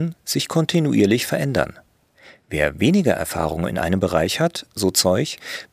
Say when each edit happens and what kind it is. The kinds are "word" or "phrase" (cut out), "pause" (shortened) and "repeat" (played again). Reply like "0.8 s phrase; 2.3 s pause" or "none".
none